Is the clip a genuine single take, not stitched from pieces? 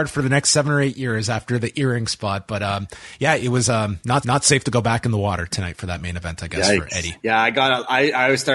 no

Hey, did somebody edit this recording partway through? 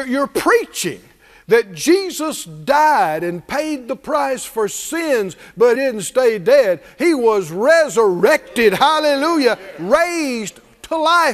yes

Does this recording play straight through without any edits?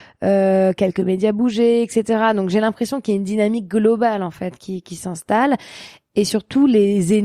yes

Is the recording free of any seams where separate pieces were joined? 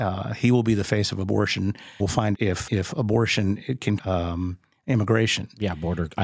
no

